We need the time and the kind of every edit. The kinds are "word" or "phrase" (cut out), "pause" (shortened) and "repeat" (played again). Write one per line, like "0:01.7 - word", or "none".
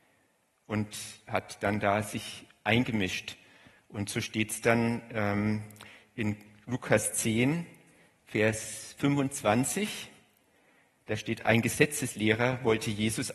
none